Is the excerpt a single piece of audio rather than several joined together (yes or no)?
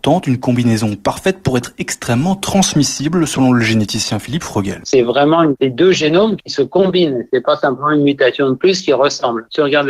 yes